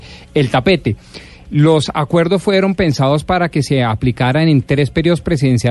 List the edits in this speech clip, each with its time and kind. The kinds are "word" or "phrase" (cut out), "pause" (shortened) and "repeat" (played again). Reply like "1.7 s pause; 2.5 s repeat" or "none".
none

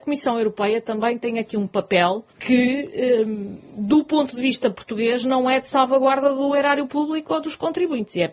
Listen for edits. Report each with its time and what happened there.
2.3 s pause

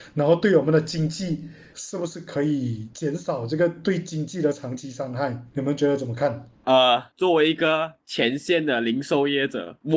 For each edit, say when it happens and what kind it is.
5.5 s pause; 7.1 s pause

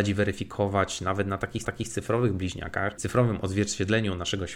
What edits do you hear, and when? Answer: 1.6 s repeat; 3.0 s word

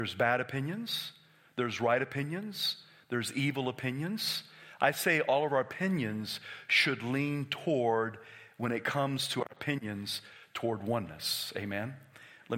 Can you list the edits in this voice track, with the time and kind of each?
none

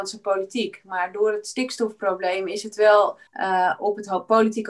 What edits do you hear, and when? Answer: 3.3 s pause

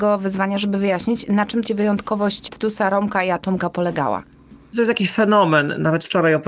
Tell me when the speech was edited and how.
1.6 s phrase

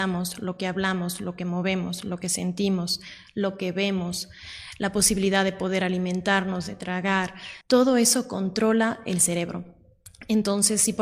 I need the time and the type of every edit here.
7.6 s pause

